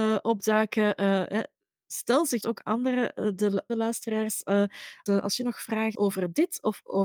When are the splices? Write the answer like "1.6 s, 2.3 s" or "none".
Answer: 2.4 s, 3.7 s, 5.1 s, 5.9 s